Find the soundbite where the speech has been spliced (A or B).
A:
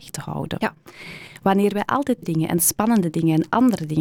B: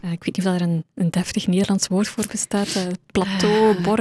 A